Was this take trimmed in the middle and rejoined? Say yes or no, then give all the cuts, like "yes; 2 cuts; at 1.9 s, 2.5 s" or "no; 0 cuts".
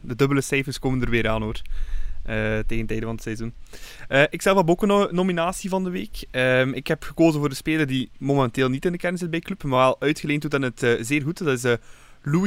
no; 0 cuts